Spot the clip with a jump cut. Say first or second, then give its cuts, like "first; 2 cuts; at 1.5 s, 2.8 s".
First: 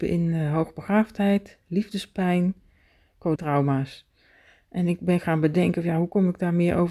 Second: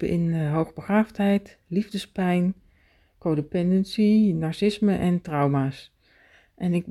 first; 1 cut; at 3.4 s